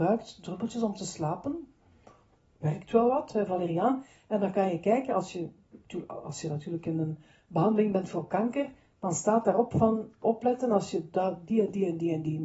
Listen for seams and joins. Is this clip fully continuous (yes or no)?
yes